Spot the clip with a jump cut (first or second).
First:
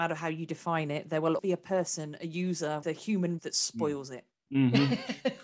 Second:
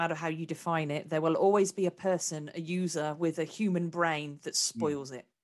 first